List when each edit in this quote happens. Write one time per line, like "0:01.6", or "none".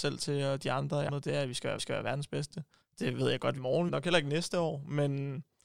0:01.1
0:01.8
0:02.8
0:03.6
0:03.9